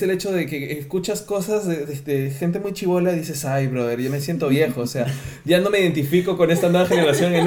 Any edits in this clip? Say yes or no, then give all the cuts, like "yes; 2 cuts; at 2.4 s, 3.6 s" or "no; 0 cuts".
no; 0 cuts